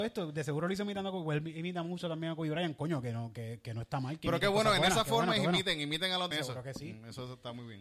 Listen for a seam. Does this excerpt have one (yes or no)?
yes